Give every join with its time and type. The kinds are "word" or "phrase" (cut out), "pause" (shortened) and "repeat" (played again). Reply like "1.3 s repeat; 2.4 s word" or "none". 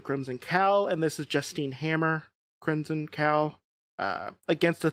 none